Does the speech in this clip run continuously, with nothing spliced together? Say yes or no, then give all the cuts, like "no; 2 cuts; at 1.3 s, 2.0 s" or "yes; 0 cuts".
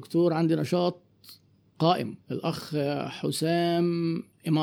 no; 1 cut; at 2.2 s